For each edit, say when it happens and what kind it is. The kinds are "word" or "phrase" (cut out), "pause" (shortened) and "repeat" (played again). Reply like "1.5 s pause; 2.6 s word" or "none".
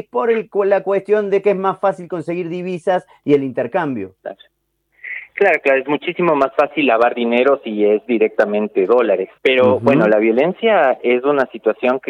9.4 s pause